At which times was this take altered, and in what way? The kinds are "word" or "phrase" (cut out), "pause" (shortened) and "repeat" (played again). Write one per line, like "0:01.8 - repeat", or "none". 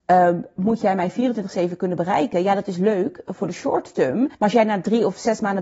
0:04.3 - pause